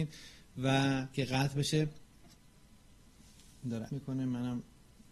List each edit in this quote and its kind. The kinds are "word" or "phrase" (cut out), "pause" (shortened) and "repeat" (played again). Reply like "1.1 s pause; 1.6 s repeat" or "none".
1.1 s word; 3.9 s word